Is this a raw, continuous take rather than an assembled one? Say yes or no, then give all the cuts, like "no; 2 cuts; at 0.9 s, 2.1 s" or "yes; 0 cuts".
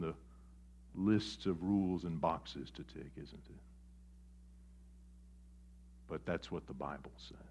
yes; 0 cuts